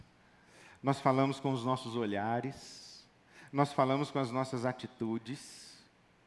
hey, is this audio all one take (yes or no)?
yes